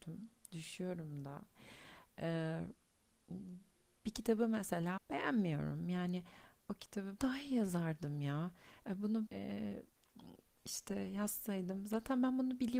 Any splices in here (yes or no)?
yes